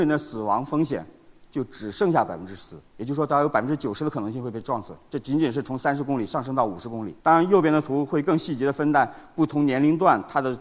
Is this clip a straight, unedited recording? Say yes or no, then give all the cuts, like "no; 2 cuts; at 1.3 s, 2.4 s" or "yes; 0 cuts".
no; 2 cuts; at 2.9 s, 7.2 s